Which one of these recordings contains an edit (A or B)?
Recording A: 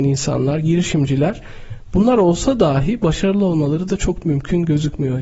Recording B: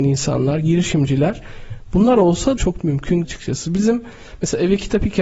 B